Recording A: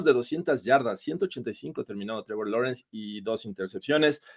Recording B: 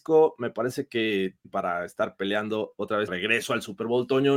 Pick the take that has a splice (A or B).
B